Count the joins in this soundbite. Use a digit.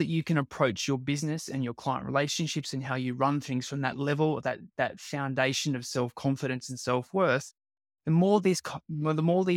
0